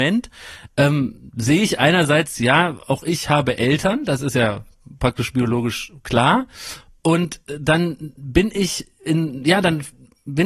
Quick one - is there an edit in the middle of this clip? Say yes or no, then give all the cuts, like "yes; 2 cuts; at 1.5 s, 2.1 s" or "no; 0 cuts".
no; 0 cuts